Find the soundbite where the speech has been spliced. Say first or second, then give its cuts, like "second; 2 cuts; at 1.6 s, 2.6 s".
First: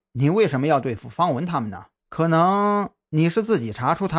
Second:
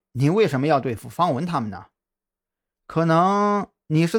first; 1 cut; at 2.0 s